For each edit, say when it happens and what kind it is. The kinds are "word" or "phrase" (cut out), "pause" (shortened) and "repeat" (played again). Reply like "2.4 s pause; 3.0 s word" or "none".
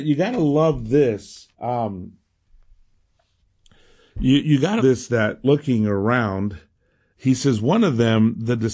1.5 s pause; 4.4 s word; 4.8 s word; 5.4 s phrase; 7.1 s phrase